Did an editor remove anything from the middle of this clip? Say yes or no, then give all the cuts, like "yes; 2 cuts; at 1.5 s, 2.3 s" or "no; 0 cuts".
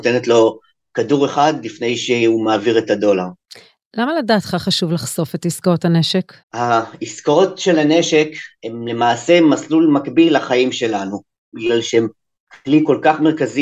yes; 1 cut; at 6.4 s